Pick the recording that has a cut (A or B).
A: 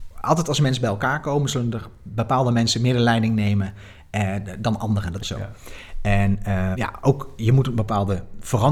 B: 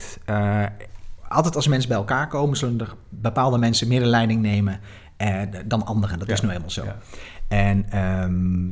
A